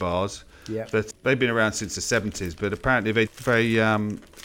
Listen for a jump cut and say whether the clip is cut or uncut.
cut